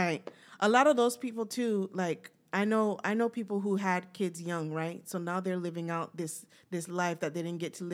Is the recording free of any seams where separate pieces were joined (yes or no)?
yes